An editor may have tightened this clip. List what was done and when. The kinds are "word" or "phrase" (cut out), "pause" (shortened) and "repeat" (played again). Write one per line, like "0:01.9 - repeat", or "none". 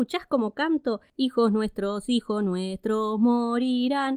none

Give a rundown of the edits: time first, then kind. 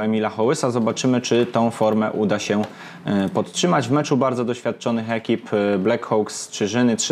none

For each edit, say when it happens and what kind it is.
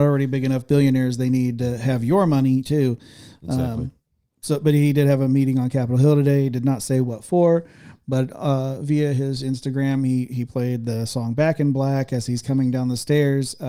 none

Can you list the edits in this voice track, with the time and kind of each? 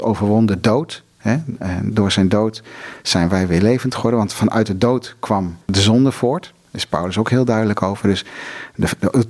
0:05.6 - pause

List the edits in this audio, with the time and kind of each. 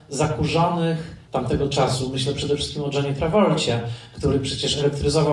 0:01.3 - word

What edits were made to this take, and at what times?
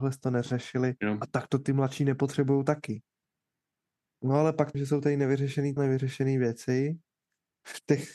0:01.0 - pause
0:04.7 - phrase
0:05.8 - word

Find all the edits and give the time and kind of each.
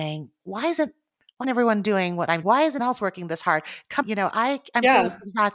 0:01.4 - word
0:02.4 - word
0:02.8 - word
0:04.0 - word

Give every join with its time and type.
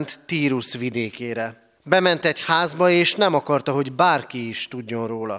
0:01.8 - pause

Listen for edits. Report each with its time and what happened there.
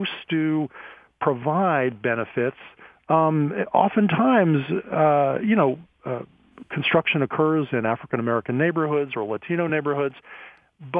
none

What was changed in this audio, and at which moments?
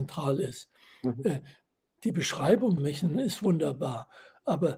0:02.8 - word

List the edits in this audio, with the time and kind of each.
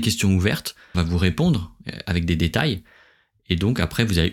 0:00.9 - word

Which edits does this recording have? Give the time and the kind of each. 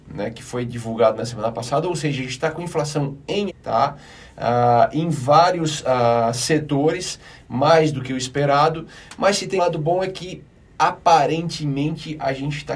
0:03.5 - word
0:09.6 - word

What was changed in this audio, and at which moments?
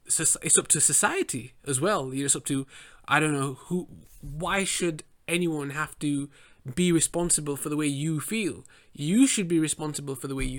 none

